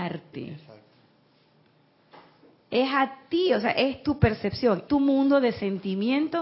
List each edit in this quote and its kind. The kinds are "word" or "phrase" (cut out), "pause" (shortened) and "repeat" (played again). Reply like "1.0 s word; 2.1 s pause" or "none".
4.9 s word